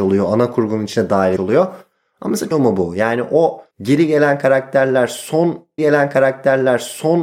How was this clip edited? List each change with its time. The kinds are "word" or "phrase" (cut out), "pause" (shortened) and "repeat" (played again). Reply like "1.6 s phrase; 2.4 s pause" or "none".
1.4 s word; 2.5 s phrase; 3.7 s pause; 5.8 s repeat